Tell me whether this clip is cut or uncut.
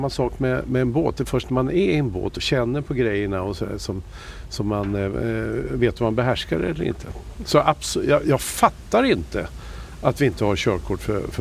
uncut